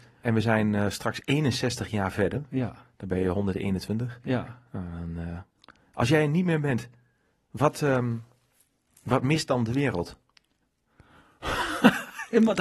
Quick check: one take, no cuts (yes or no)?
yes